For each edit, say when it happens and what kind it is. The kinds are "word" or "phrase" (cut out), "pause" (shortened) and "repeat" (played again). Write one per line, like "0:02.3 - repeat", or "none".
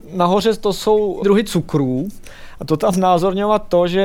0:01.2 - word
0:02.9 - word